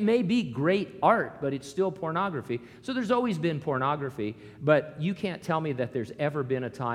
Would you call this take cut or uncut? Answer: uncut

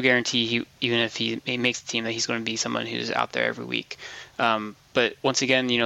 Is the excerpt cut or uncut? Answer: uncut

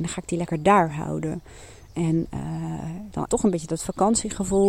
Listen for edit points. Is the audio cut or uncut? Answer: cut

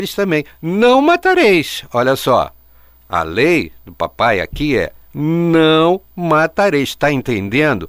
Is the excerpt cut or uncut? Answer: uncut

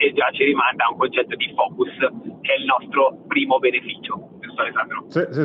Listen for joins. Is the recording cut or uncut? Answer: uncut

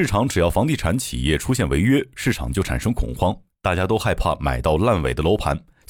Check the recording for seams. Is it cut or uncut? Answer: uncut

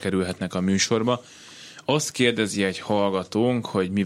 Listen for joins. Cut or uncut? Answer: uncut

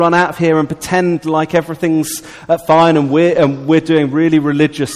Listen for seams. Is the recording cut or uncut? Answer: uncut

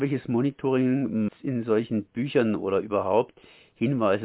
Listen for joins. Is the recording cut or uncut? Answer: cut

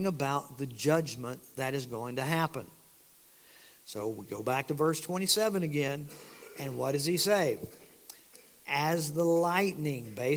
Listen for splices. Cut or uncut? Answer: uncut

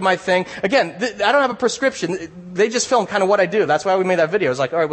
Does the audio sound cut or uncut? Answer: uncut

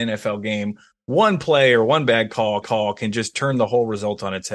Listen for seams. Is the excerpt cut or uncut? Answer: cut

